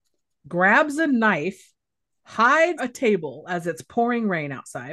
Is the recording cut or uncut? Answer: cut